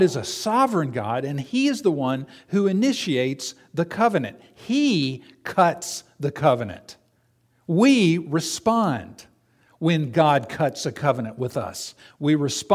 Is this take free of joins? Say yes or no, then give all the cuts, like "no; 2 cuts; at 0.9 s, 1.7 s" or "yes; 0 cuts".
yes; 0 cuts